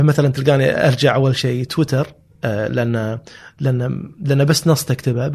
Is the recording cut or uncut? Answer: uncut